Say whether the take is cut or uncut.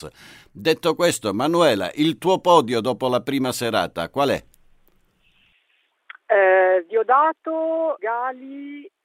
cut